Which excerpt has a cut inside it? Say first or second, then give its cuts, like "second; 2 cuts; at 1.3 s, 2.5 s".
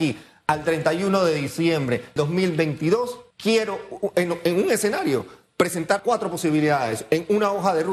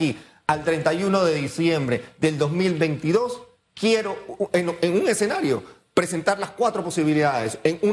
first; 3 cuts; at 2.2 s, 3.3 s, 6.0 s